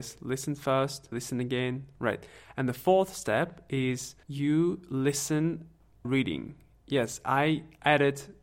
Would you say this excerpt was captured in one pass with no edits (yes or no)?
no